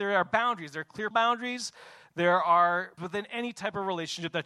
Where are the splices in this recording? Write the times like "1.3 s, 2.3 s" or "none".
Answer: 1.1 s, 3.0 s